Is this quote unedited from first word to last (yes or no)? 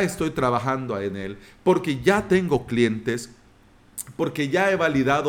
yes